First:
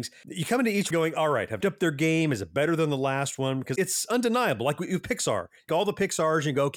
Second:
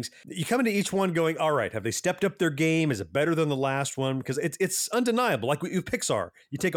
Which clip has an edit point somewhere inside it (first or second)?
first